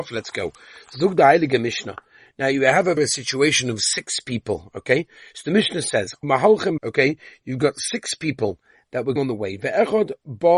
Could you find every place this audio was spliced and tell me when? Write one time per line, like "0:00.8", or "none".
0:03.0
0:06.2
0:06.8
0:09.2